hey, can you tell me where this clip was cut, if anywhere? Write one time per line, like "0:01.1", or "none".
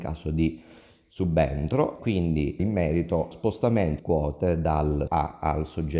0:02.0
0:02.6
0:03.3
0:04.0
0:05.1